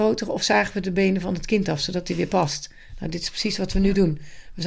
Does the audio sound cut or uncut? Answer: uncut